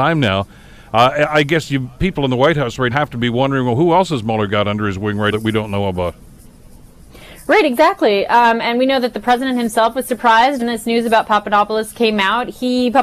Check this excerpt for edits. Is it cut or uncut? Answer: cut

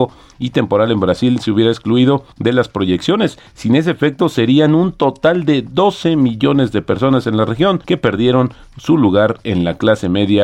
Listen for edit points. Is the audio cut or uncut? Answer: cut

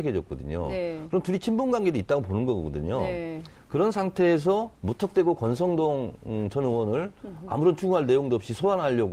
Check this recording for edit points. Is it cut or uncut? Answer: cut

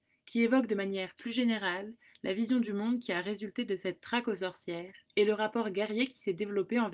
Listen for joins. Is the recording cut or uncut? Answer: uncut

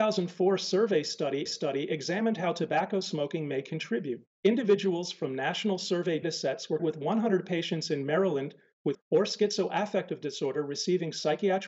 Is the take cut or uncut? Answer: cut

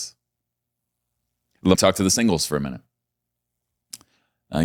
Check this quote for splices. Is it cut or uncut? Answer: cut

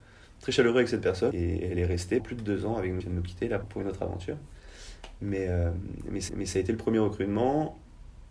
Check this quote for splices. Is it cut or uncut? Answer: cut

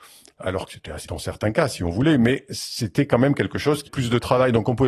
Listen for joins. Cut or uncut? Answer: cut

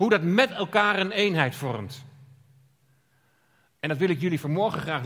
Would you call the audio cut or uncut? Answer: uncut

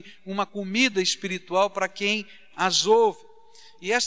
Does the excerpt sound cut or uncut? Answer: uncut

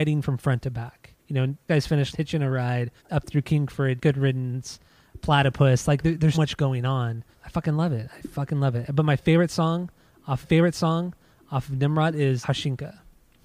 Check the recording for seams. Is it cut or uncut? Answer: cut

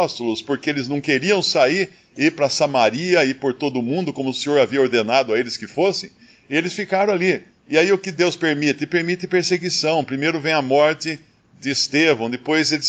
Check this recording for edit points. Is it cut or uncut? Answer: uncut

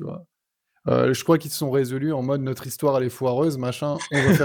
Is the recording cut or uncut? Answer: uncut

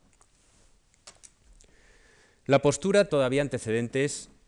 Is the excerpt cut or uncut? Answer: cut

